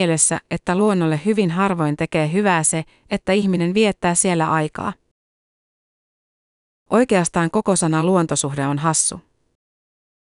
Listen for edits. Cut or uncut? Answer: uncut